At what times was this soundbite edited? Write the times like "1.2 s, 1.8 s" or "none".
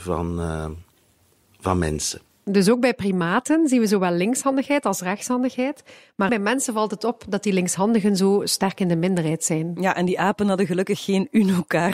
6.3 s